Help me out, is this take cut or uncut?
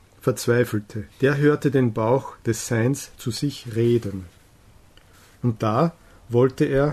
cut